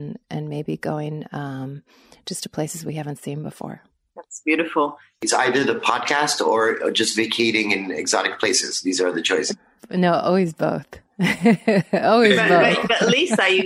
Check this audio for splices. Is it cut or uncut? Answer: uncut